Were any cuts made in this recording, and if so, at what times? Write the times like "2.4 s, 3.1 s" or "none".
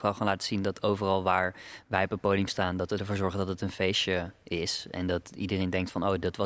none